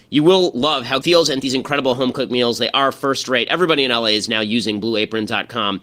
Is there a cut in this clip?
yes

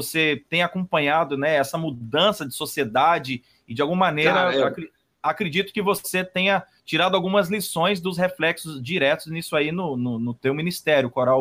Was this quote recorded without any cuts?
yes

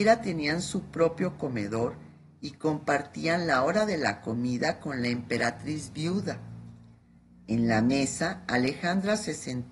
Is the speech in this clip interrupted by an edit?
no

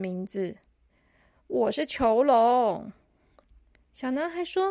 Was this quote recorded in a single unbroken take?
yes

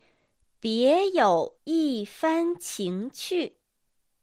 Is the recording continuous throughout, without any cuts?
no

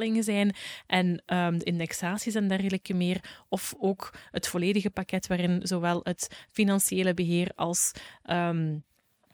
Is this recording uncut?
yes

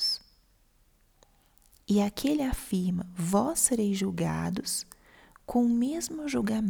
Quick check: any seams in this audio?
no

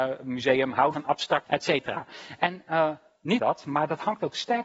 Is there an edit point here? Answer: yes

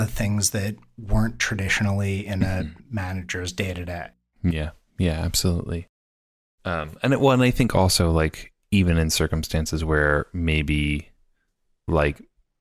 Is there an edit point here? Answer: no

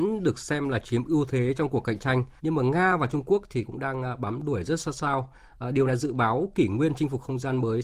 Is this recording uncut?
no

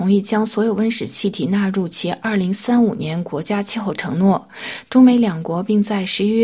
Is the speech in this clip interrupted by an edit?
no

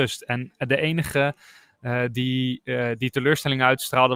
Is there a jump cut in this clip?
no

